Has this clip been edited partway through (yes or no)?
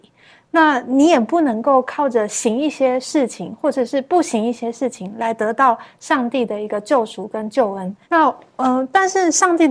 yes